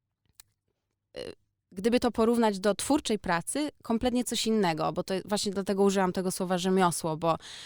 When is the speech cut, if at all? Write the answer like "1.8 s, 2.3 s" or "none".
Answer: none